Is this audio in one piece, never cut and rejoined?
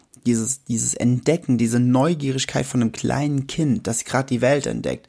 yes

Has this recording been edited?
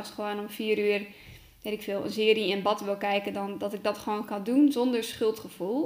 no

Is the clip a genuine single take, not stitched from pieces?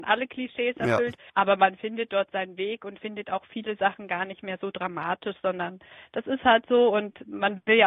no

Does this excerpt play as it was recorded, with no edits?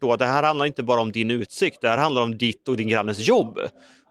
yes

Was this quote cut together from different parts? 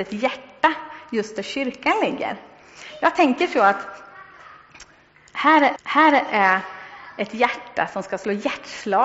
yes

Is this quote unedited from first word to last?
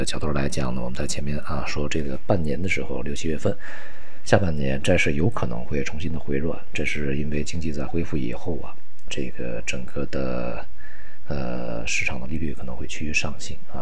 no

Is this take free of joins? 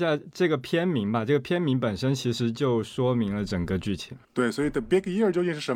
no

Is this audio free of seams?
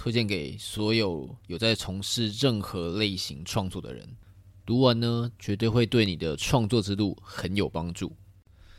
yes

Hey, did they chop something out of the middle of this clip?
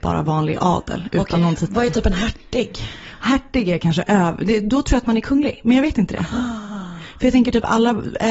no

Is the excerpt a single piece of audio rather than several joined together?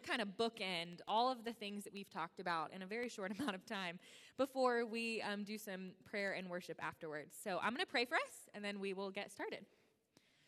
yes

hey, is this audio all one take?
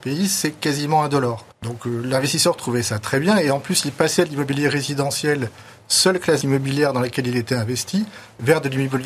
no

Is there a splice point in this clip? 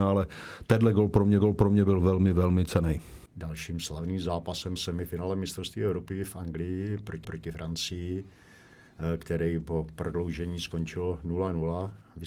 yes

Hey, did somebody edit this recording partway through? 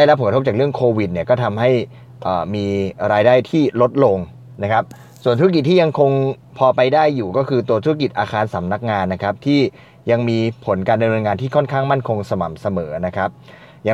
no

